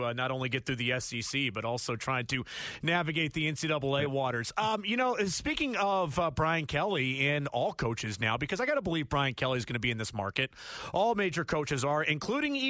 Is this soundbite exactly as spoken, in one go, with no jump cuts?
yes; 0 cuts

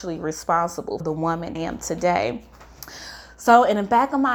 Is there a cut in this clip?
yes; 2 cuts; at 1.0 s, 1.6 s

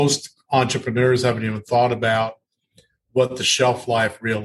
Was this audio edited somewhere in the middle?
no; 0 cuts

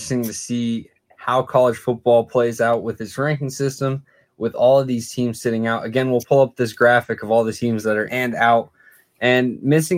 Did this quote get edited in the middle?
yes; 1 cut; at 8.1 s

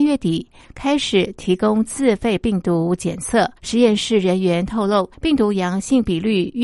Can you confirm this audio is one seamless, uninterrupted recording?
no; 2 cuts; at 3.6 s, 5.1 s

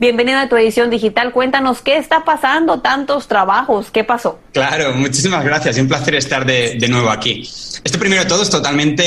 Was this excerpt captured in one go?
no; 1 cut; at 4.5 s

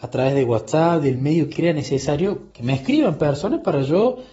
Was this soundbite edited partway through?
yes; 2 cuts; at 1.5 s, 2.5 s

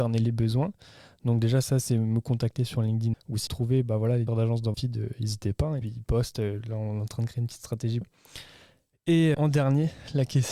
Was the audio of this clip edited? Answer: yes; 7 cuts; at 3.1 s, 3.5 s, 4.3 s, 4.7 s, 5.8 s, 8.0 s, 9.3 s

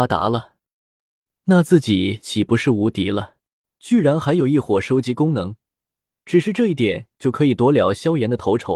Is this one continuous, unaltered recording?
no; 1 cut; at 3.5 s

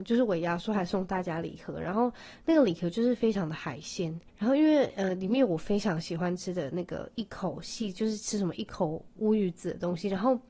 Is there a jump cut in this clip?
yes; 1 cut; at 4.3 s

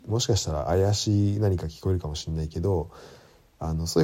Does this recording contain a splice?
no; 0 cuts

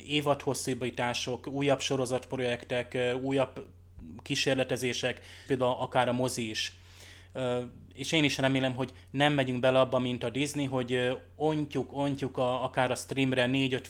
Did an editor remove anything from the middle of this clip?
yes; 1 cut; at 5.5 s

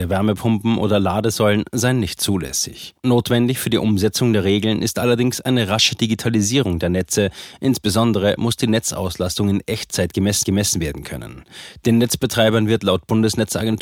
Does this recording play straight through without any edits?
no; 2 cuts; at 3.0 s, 10.4 s

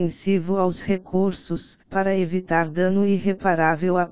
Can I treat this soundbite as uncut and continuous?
no; 1 cut; at 1.8 s

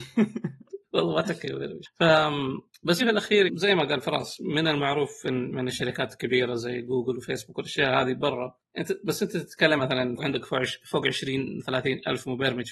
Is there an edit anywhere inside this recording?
yes; 4 cuts; at 3.0 s, 3.5 s, 9.8 s, 10.2 s

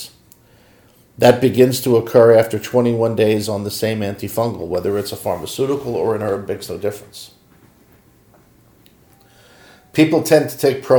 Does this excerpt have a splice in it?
no; 0 cuts

